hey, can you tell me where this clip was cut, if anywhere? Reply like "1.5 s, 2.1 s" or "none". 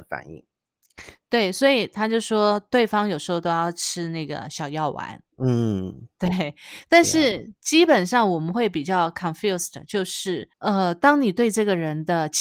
5.3 s, 10.5 s